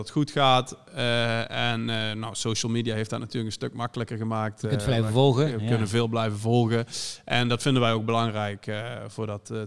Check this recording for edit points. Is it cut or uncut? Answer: uncut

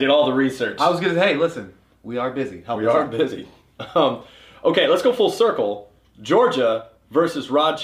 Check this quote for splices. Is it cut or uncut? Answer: uncut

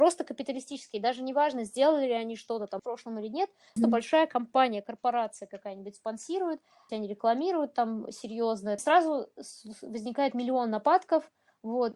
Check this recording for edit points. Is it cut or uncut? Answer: cut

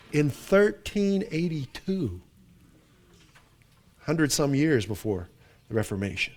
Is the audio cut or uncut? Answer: uncut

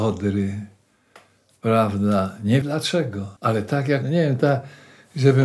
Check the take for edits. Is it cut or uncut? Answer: cut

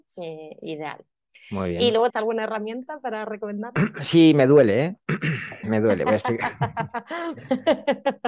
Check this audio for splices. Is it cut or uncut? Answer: cut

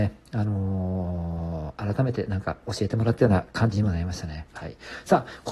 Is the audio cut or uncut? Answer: cut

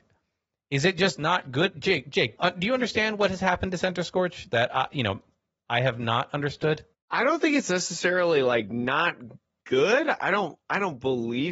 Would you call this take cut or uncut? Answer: cut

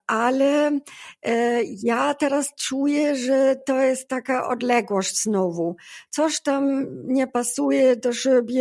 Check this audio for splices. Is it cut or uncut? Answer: uncut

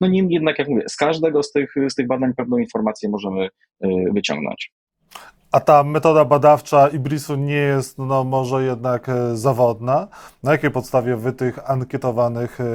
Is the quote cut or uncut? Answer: uncut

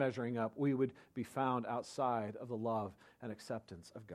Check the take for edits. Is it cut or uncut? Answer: uncut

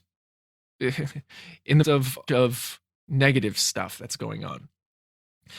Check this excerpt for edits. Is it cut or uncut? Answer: cut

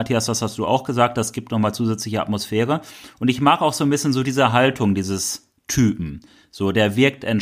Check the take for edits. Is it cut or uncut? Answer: uncut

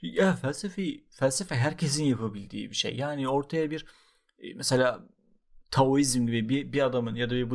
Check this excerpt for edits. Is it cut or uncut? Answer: cut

